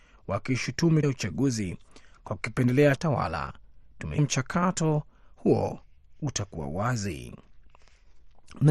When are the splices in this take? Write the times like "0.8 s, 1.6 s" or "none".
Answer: 1.0 s, 3.0 s, 4.2 s